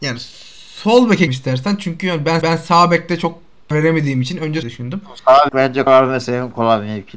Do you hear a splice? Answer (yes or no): yes